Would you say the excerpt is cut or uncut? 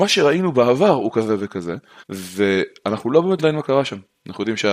cut